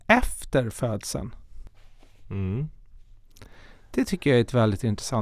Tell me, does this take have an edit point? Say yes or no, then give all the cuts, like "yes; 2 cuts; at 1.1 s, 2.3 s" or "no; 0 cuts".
no; 0 cuts